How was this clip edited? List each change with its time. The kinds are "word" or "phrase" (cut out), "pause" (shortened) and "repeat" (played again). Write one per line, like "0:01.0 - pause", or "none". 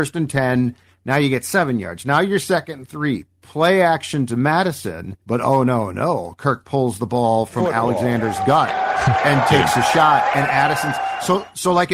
0:05.2 - pause